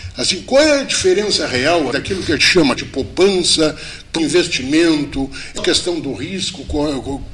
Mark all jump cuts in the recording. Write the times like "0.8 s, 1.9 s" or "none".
1.9 s, 2.4 s, 2.8 s, 4.2 s, 5.6 s